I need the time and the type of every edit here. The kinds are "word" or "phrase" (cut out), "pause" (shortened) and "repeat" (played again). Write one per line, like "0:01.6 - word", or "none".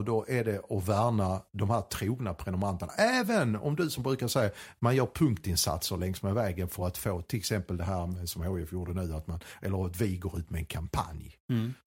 none